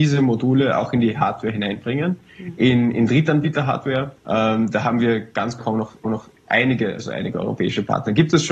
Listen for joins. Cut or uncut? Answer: cut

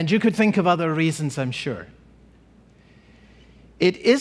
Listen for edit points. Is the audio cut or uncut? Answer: uncut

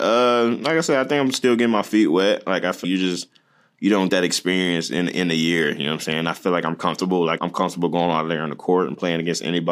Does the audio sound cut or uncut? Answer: cut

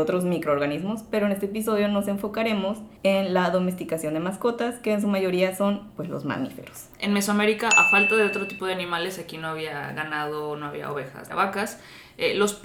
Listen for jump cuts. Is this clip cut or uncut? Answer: cut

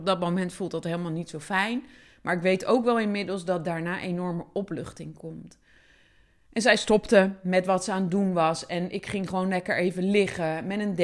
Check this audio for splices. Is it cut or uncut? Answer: uncut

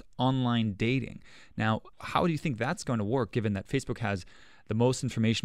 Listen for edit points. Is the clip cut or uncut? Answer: cut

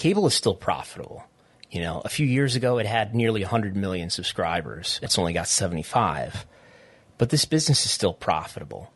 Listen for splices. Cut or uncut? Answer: cut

